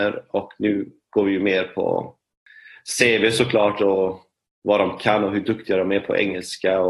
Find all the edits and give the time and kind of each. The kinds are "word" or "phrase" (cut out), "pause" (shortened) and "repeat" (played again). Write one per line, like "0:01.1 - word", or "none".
none